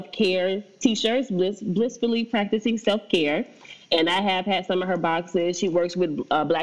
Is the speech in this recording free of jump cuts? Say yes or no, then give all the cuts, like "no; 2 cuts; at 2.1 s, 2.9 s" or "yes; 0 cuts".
yes; 0 cuts